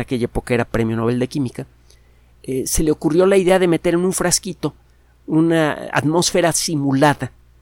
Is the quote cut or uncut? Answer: uncut